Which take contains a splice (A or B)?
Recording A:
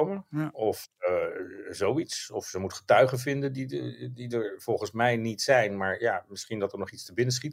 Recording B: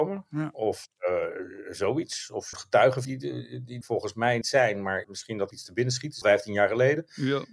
B